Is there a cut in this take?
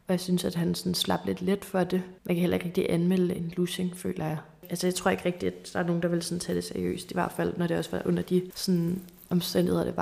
yes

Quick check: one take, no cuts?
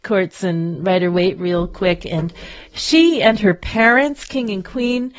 yes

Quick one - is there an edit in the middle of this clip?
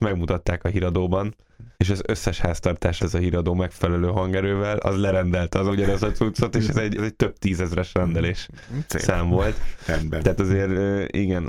yes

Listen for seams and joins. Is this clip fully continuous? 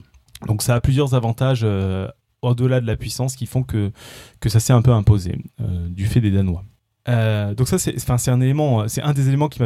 yes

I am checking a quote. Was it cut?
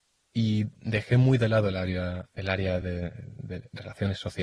no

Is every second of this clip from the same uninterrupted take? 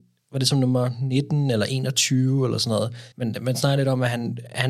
no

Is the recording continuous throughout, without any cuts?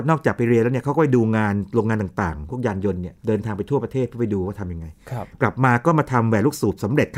no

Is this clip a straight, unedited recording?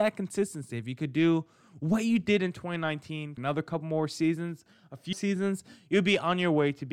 no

